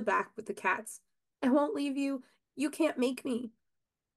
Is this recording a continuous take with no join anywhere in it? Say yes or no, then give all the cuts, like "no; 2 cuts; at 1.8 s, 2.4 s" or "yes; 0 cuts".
yes; 0 cuts